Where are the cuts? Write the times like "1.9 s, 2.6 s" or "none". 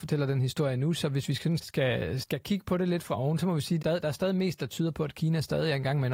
1.6 s, 2.2 s, 3.8 s